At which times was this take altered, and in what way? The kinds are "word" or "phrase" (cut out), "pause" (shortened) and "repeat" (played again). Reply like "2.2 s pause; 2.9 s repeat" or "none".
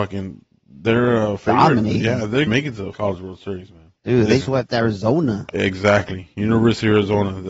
2.5 s word; 2.9 s word; 4.0 s pause; 4.4 s word